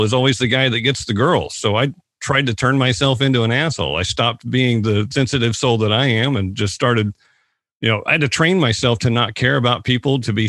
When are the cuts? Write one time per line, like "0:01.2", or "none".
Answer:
none